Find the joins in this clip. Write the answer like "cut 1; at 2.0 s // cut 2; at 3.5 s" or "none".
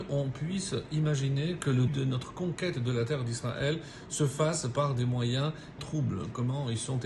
cut 1; at 1.9 s // cut 2; at 5.8 s